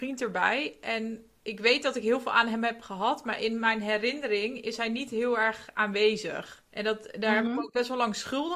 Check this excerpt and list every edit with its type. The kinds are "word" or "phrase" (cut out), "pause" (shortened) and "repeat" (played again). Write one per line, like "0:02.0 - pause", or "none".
0:06.7 - pause